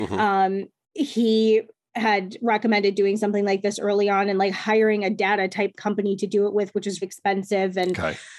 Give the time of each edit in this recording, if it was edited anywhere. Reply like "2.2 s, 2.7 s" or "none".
7.0 s